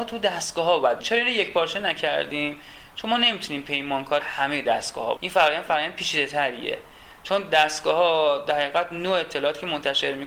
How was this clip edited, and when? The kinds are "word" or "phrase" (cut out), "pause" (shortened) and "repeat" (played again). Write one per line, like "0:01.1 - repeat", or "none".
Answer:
0:01.0 - word
0:04.2 - word
0:05.2 - word